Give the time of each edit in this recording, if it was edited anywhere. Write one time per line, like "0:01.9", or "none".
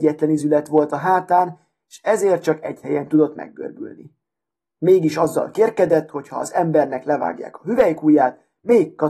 none